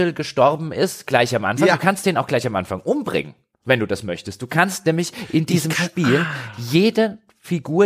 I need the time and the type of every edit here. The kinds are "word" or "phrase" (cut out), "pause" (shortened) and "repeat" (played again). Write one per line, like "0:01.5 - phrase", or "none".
none